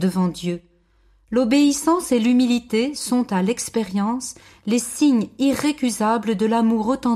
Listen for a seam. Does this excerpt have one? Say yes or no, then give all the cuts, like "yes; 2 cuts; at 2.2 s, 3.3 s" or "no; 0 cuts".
no; 0 cuts